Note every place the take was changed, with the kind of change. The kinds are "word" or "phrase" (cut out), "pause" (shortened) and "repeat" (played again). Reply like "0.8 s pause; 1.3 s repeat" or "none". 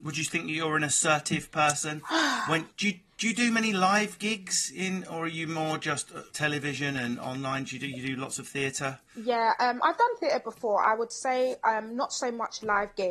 2.7 s pause; 6.3 s pause

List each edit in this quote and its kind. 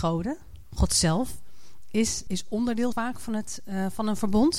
2.3 s word; 2.9 s word

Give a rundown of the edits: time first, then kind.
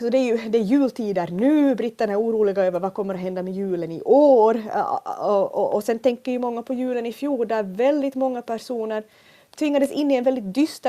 none

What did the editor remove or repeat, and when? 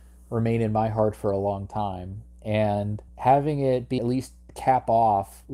3.1 s pause; 4.0 s phrase

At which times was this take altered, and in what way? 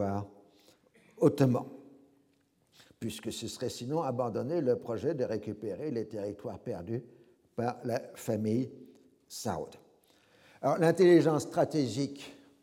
none

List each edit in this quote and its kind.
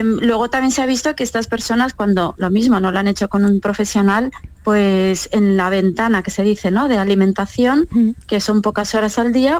none

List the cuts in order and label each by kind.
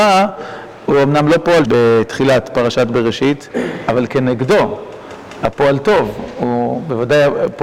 1.7 s word

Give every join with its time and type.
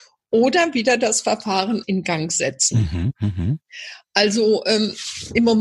1.8 s word

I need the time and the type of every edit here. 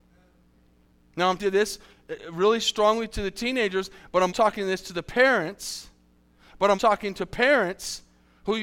1.4 s word; 4.3 s word; 6.7 s word

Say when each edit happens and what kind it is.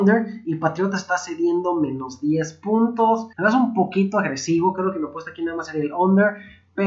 3.3 s pause

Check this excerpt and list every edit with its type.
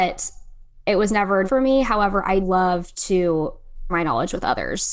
1.4 s word; 2.4 s word; 3.9 s word

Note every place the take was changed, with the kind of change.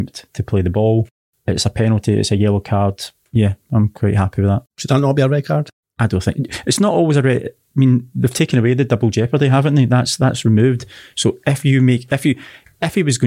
4.7 s pause

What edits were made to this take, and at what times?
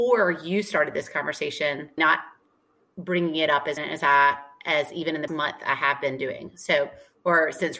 2.0 s word; 3.8 s word; 5.3 s word

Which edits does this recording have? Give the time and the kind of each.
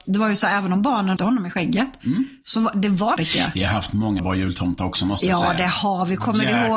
1.2 s word; 3.2 s word; 4.2 s word

